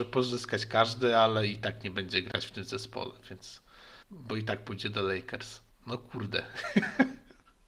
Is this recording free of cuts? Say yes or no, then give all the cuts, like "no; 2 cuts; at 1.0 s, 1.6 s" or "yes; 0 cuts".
no; 2 cuts; at 4.0 s, 5.7 s